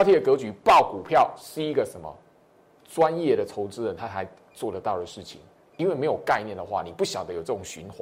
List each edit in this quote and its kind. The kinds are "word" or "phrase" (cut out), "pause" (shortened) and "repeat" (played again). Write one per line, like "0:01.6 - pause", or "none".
none